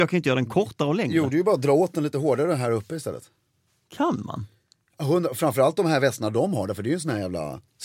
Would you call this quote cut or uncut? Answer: uncut